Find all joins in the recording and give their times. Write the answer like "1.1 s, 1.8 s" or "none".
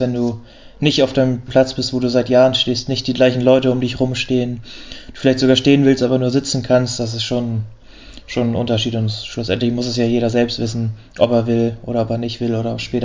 1.5 s